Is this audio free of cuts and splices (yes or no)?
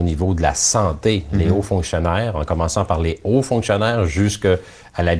yes